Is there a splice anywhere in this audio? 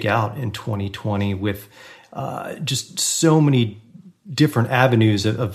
no; 0 cuts

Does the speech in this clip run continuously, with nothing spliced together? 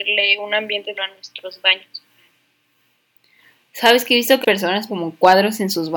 no; 3 cuts; at 0.9 s, 4.4 s, 4.9 s

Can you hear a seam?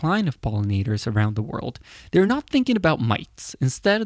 no; 0 cuts

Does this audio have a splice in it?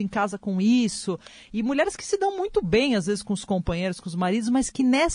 no; 0 cuts

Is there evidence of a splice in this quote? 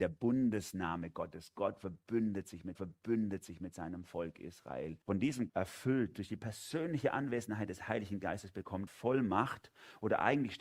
yes; 4 cuts; at 2.7 s, 5.0 s, 5.5 s, 8.9 s

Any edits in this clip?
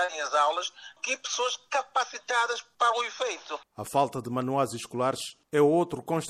yes; 1 cut; at 1.0 s

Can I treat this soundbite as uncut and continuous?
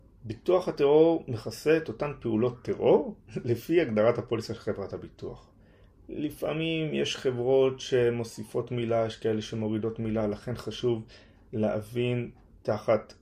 yes; 0 cuts

